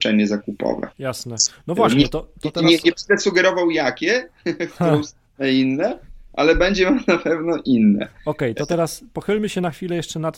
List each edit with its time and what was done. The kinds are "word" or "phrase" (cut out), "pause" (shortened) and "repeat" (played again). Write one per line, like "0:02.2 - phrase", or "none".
0:00.9 - pause